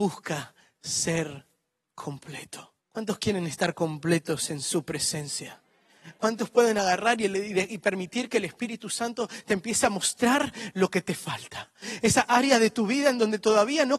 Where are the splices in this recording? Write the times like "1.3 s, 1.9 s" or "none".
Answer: 2.8 s